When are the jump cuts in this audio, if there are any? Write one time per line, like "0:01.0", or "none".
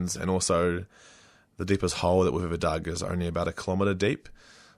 none